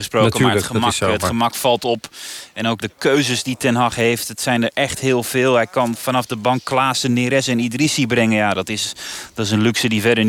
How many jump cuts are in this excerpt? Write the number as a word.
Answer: one